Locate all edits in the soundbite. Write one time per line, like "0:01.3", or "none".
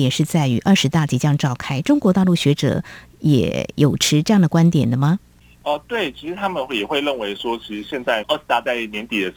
none